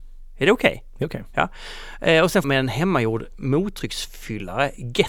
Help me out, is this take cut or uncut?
cut